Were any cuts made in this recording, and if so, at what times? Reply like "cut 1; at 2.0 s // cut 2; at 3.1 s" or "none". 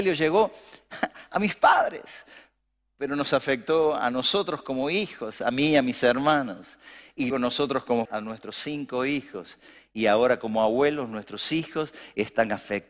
cut 1; at 7.3 s // cut 2; at 8.1 s

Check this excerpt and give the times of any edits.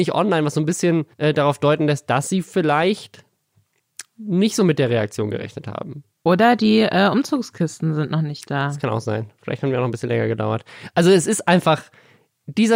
cut 1; at 1.1 s // cut 2; at 6.2 s

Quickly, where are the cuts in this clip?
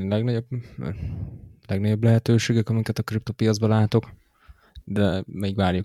none

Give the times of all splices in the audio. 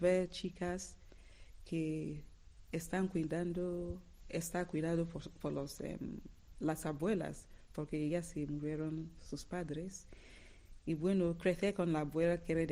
none

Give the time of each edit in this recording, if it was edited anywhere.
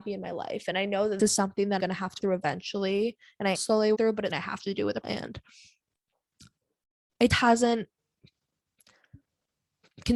cut 1; at 1.2 s // cut 2; at 1.8 s // cut 3; at 2.2 s // cut 4; at 3.5 s // cut 5; at 3.9 s // cut 6; at 4.3 s // cut 7; at 5.0 s // cut 8; at 7.3 s

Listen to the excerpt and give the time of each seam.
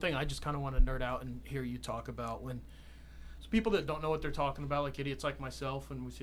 none

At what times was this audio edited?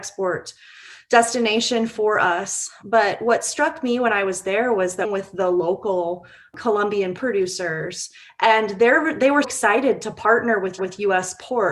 cut 1; at 5.0 s // cut 2; at 7.2 s // cut 3; at 9.4 s // cut 4; at 10.8 s

